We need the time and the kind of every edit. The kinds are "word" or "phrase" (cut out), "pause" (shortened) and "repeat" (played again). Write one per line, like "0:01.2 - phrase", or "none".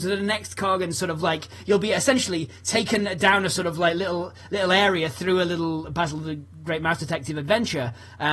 none